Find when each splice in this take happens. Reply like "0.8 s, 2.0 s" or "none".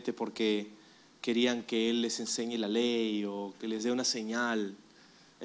none